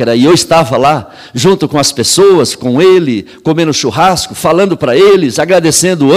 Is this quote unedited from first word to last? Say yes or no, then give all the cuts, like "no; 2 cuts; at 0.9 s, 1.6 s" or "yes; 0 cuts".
yes; 0 cuts